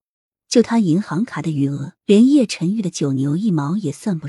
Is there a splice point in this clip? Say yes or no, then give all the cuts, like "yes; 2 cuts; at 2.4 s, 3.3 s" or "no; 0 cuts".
yes; 1 cut; at 2.0 s